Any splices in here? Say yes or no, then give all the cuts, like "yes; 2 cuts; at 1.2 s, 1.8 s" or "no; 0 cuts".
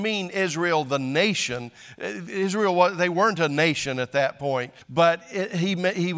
yes; 1 cut; at 4.8 s